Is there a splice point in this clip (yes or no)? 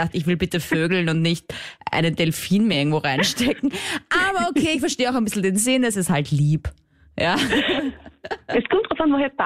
no